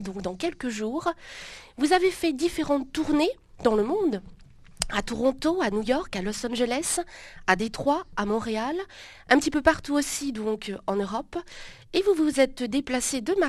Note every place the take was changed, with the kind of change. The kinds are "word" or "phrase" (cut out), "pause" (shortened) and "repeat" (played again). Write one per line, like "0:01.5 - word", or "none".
none